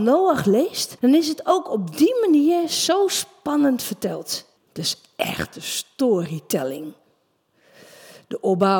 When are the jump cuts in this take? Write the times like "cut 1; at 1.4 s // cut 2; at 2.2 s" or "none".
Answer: cut 1; at 1.0 s // cut 2; at 4.6 s